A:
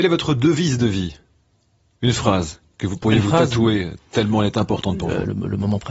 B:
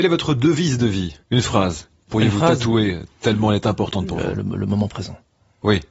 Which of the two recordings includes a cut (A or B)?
B